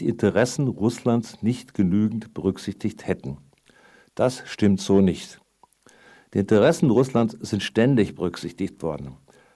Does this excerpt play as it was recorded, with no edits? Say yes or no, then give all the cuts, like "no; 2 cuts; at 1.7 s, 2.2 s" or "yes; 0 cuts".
yes; 0 cuts